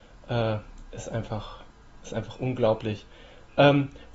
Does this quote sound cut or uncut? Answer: uncut